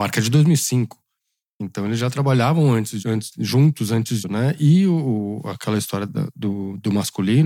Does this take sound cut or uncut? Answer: cut